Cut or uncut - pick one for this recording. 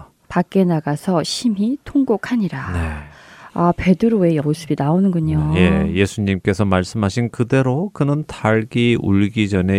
cut